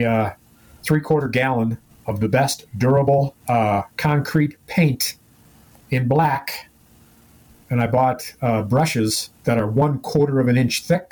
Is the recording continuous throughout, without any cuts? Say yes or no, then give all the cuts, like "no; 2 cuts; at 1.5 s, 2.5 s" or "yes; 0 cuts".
no; 3 cuts; at 1.9 s, 3.4 s, 9.3 s